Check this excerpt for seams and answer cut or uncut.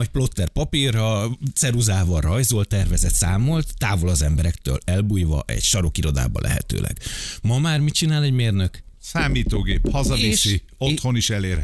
cut